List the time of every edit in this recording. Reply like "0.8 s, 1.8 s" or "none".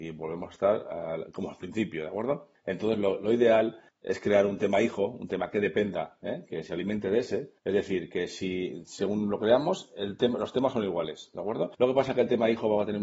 7.6 s